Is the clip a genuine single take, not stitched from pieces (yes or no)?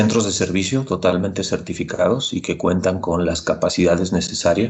yes